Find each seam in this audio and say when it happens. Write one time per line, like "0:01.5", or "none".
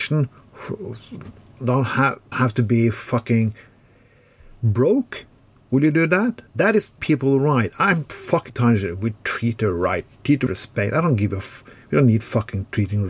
0:02.3
0:07.0
0:08.5
0:10.5